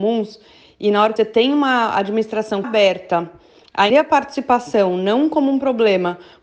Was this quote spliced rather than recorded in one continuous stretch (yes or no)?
yes